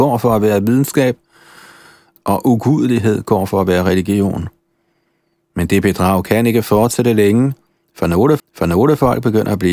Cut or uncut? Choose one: cut